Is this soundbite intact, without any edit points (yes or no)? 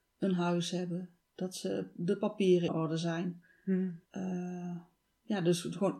no